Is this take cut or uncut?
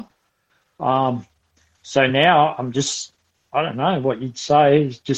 uncut